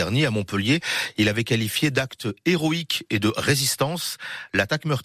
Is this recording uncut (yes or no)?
yes